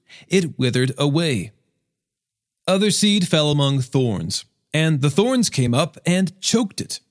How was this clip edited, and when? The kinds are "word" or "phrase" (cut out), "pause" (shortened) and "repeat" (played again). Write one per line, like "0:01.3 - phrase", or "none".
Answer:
none